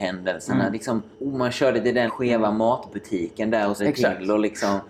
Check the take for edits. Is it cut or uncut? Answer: cut